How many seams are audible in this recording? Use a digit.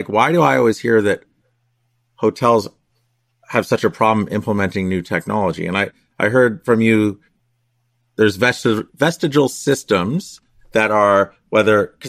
1